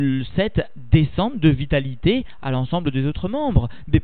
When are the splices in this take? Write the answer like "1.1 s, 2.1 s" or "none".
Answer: none